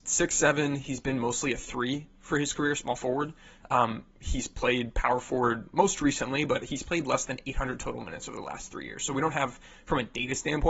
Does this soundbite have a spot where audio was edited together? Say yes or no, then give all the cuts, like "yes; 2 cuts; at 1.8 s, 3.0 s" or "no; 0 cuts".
no; 0 cuts